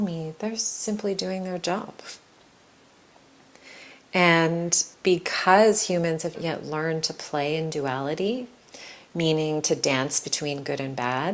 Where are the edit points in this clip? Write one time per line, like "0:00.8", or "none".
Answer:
0:04.9
0:06.3